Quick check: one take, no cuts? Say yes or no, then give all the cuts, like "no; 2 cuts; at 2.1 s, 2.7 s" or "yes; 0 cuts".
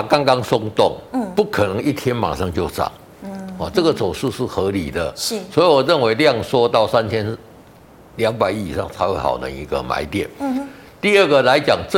yes; 0 cuts